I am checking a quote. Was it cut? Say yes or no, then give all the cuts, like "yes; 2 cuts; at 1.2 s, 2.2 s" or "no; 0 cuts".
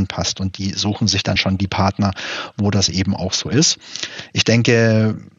no; 0 cuts